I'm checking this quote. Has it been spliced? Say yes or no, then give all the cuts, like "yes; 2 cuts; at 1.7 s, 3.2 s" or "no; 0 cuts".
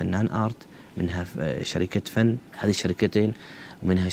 yes; 1 cut; at 2.5 s